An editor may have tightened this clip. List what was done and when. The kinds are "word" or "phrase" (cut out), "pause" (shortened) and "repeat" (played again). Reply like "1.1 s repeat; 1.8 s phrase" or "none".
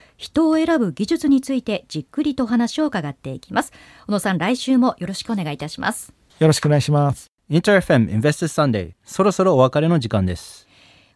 none

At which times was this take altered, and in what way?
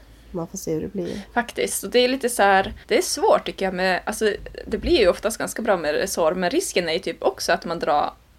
2.8 s pause

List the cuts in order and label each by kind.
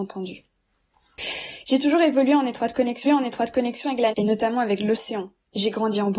3.1 s repeat; 4.1 s word

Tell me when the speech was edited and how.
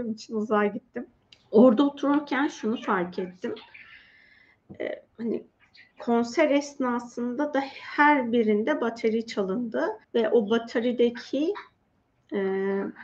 1.2 s pause; 5.1 s pause; 10.0 s pause

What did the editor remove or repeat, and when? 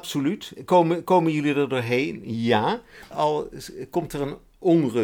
none

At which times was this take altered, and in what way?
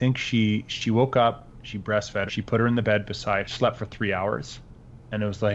2.3 s word; 3.4 s word

